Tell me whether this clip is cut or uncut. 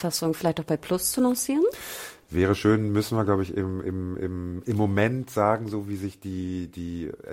uncut